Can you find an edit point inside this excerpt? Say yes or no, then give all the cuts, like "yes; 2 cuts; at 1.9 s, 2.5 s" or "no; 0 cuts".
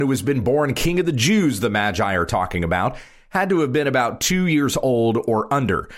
no; 0 cuts